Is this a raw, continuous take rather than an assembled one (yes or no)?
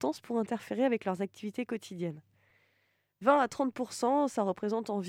yes